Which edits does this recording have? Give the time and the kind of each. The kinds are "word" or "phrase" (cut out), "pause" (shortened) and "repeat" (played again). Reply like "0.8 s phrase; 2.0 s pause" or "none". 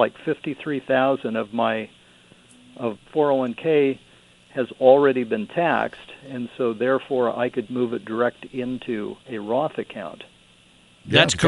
3.0 s word; 7.7 s word; 9.2 s pause